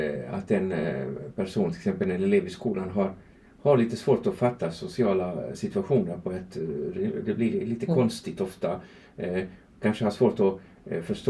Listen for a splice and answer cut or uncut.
uncut